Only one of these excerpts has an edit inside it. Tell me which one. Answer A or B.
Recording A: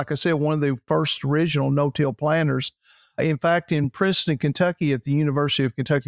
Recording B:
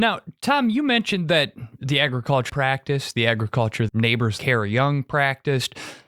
B